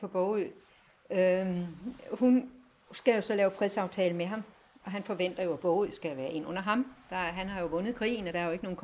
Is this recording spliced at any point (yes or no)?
no